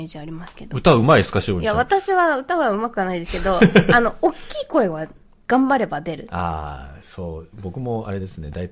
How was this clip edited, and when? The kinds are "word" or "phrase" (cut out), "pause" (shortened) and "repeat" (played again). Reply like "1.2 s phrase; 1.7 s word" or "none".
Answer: 7.5 s pause